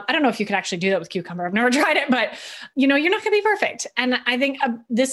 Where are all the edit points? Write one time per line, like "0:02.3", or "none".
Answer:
0:02.7